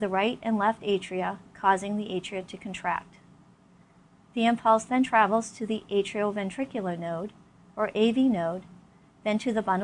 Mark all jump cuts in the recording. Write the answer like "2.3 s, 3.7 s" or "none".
none